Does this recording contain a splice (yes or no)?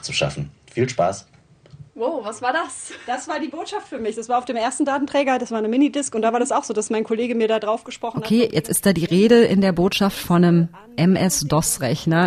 yes